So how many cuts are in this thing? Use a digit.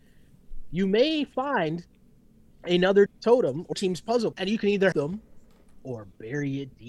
4